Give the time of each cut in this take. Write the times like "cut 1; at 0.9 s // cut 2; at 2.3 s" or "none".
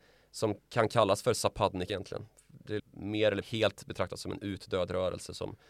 cut 1; at 1.9 s // cut 2; at 2.8 s // cut 3; at 3.4 s

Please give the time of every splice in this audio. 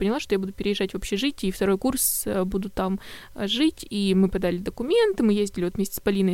none

